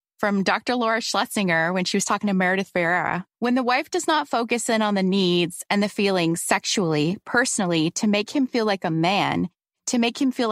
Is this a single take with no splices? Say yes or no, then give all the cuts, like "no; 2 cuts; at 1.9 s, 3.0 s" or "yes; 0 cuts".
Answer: no; 1 cut; at 3.3 s